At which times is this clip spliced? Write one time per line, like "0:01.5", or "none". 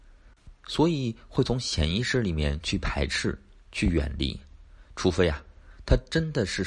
none